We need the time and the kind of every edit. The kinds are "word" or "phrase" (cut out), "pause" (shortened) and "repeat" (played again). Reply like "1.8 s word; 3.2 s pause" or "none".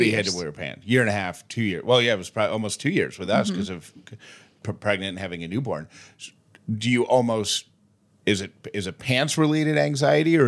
none